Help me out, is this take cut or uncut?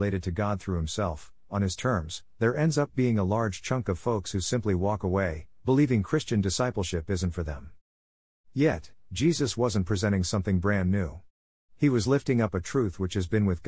uncut